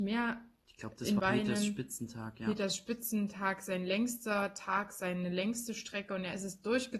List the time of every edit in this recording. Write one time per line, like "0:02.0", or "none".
0:01.2